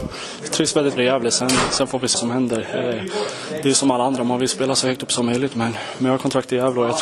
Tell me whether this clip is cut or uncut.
cut